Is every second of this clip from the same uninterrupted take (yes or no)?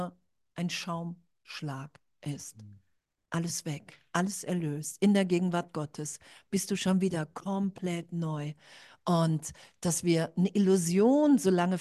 yes